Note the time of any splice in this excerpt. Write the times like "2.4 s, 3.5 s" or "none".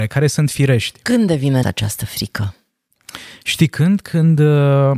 1.6 s